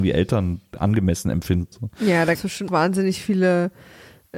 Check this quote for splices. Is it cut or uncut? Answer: cut